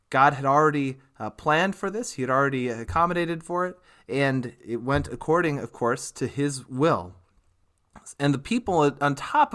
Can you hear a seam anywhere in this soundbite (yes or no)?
yes